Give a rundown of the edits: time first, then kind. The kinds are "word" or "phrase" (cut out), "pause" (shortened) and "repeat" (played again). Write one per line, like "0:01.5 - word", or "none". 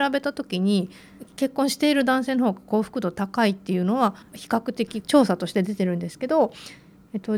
0:04.2 - pause